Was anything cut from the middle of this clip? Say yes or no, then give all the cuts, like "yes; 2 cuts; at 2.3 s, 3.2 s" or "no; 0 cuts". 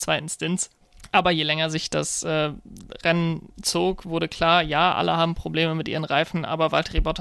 no; 0 cuts